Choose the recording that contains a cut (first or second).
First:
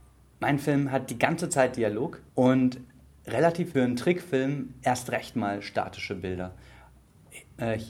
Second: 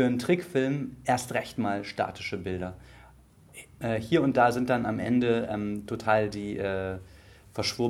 first